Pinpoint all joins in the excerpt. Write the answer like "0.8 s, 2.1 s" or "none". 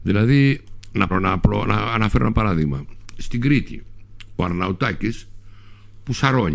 1.1 s